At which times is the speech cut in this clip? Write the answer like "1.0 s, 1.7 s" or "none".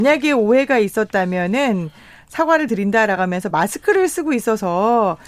none